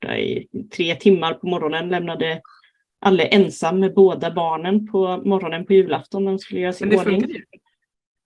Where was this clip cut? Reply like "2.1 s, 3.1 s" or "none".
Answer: none